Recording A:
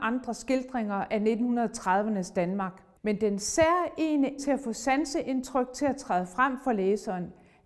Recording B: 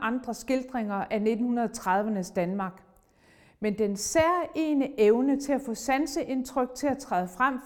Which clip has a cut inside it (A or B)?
A